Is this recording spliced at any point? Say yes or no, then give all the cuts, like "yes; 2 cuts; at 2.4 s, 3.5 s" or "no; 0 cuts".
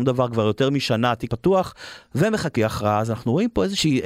yes; 2 cuts; at 1.3 s, 2.6 s